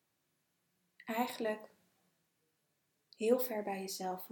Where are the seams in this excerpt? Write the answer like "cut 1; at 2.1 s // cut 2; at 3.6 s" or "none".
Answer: none